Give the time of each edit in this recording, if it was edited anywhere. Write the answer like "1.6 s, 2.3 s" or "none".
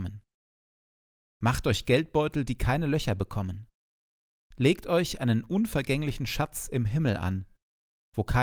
none